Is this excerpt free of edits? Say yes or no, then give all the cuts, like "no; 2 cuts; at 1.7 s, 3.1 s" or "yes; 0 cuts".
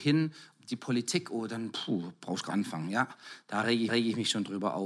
no; 2 cuts; at 2.5 s, 3.9 s